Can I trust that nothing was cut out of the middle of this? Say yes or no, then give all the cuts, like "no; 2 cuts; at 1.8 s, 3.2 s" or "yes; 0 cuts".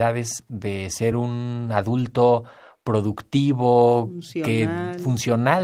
yes; 0 cuts